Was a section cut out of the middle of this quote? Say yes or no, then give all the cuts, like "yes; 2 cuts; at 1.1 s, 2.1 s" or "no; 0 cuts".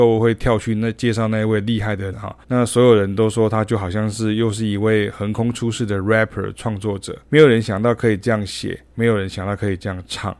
yes; 3 cuts; at 2.1 s, 2.4 s, 7.2 s